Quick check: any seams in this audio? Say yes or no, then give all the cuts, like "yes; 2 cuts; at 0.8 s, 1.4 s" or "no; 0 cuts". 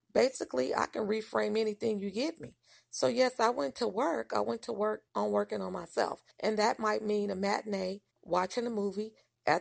yes; 3 cuts; at 5.1 s, 6.3 s, 8.1 s